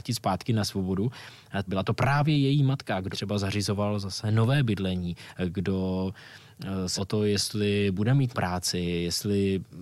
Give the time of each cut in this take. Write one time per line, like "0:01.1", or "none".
0:01.7
0:03.1
0:07.0
0:08.3